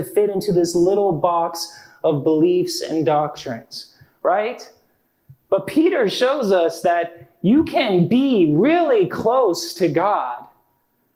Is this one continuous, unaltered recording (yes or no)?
yes